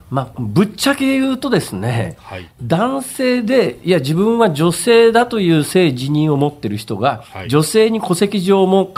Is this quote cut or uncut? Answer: cut